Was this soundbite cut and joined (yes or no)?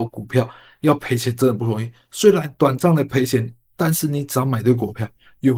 yes